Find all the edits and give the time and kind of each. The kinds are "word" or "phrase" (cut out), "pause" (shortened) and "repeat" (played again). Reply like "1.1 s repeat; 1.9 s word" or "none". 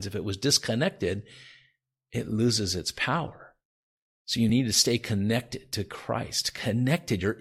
none